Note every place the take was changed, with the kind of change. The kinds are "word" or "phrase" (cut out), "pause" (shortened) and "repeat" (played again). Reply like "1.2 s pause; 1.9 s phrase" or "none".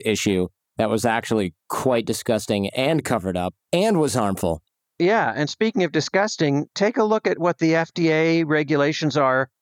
none